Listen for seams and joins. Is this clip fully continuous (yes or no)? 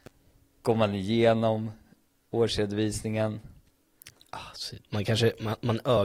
no